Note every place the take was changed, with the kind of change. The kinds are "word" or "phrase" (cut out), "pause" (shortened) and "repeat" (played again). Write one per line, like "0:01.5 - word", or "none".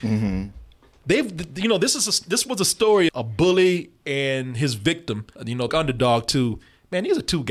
0:03.1 - word
0:05.3 - pause
0:05.7 - phrase